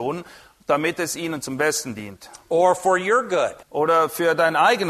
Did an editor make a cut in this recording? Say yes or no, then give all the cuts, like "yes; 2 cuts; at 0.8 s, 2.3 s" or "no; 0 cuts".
yes; 1 cut; at 3.6 s